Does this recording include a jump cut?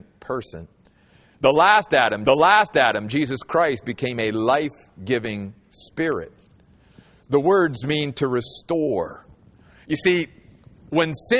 yes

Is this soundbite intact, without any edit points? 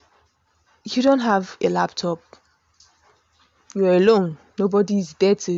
yes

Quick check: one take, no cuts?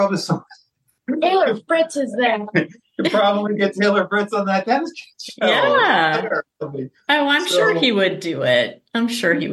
yes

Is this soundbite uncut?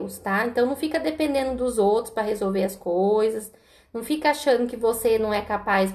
yes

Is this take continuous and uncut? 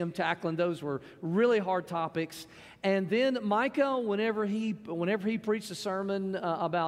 yes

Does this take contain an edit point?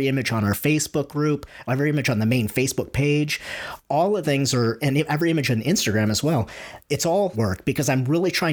yes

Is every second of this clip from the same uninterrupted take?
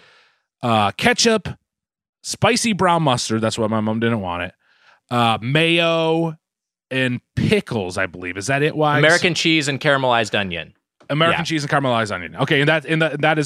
yes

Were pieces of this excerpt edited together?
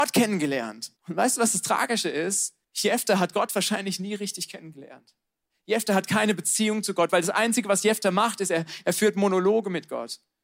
yes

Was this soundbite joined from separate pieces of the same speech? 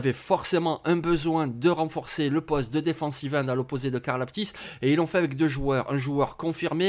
no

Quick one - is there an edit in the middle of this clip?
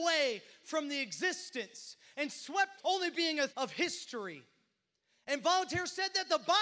yes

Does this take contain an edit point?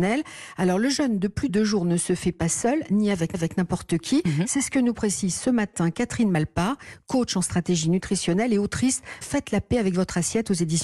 yes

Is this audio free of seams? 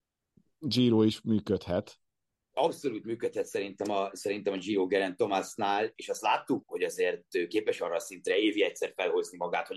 no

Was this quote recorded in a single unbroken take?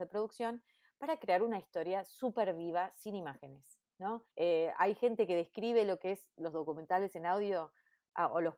no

